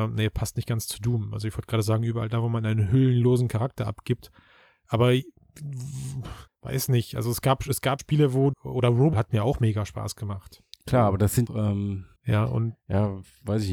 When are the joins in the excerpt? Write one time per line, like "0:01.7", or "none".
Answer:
0:06.5
0:08.0
0:08.5
0:09.1
0:10.7
0:11.5
0:12.2